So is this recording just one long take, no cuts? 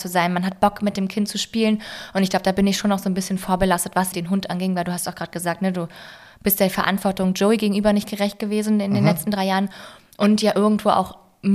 no; 1 cut; at 4.1 s

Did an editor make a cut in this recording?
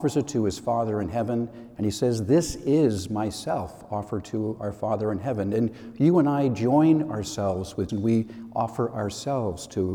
yes; 1 cut; at 7.9 s

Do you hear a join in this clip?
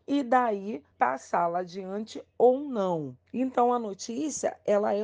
yes; 2 cuts; at 0.9 s, 3.3 s

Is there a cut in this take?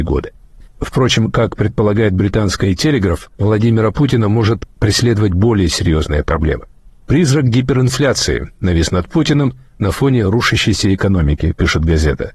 yes; 1 cut; at 3.3 s

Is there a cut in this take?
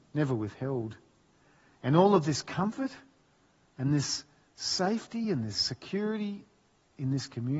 no; 0 cuts

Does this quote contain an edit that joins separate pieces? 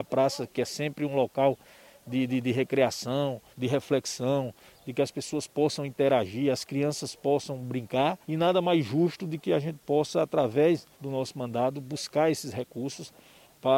yes; 3 cuts; at 3.5 s, 8.2 s, 10.9 s

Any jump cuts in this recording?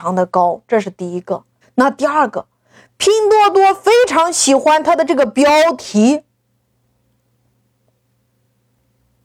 yes; 1 cut; at 1.6 s

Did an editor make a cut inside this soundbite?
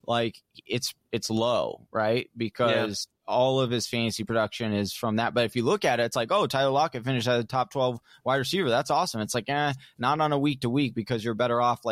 no; 0 cuts

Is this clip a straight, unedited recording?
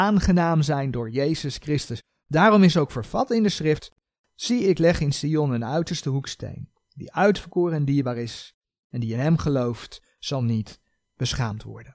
yes; 0 cuts

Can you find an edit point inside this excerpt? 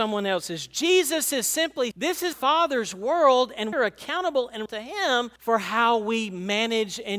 yes; 5 cuts; at 1.9 s, 2.3 s, 3.7 s, 4.7 s, 5.4 s

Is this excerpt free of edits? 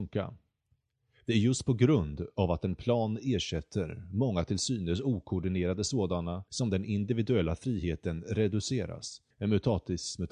no; 2 cuts; at 6.5 s, 9.3 s

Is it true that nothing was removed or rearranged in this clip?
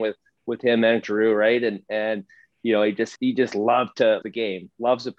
no; 3 cuts; at 1.0 s, 3.2 s, 4.2 s

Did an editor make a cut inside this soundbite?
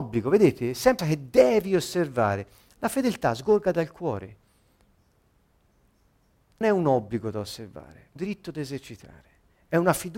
yes; 3 cuts; at 1.0 s, 6.6 s, 8.2 s

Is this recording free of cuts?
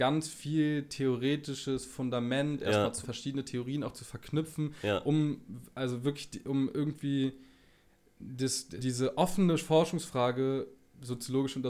no; 2 cuts; at 3.0 s, 8.8 s

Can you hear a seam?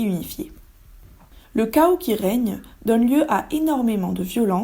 yes; 1 cut; at 1.4 s

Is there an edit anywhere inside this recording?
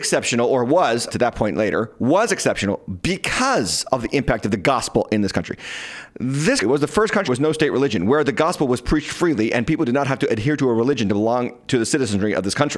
yes; 3 cuts; at 1.1 s, 6.6 s, 7.3 s

